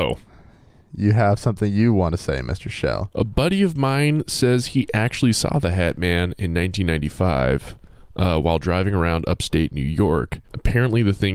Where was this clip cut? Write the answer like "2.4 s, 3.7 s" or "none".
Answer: 10.4 s